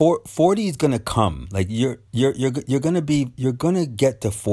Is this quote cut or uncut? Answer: cut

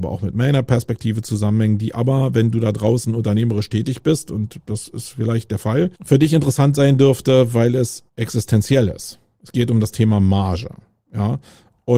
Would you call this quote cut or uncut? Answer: cut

